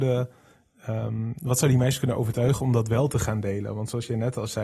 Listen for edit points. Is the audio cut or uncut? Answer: uncut